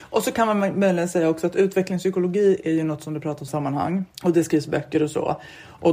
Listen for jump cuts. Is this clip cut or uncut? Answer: cut